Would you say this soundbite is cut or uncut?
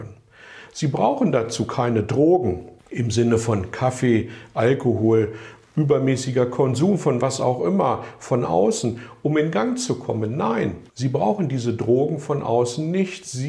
cut